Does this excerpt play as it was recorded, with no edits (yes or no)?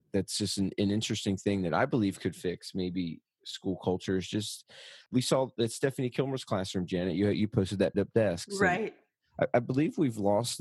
no